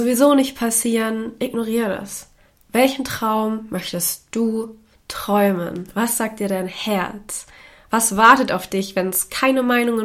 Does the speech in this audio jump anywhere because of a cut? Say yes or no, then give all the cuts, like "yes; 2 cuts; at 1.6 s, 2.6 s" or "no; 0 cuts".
no; 0 cuts